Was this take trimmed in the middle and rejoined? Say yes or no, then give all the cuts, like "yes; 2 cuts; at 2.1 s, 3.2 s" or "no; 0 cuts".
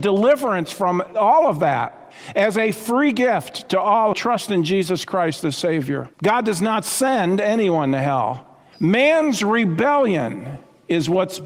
yes; 2 cuts; at 4.1 s, 6.1 s